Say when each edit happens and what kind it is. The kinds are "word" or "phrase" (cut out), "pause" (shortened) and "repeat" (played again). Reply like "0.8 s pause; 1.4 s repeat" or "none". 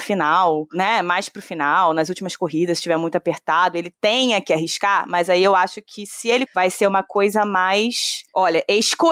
6.5 s word